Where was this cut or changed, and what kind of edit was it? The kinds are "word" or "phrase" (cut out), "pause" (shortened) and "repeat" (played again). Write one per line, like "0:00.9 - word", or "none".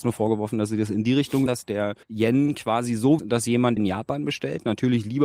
0:01.5 - word
0:02.0 - pause
0:03.2 - phrase
0:03.8 - word